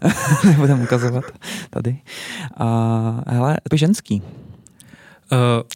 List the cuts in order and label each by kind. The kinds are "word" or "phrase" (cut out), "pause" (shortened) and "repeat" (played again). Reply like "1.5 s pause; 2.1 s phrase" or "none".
3.7 s phrase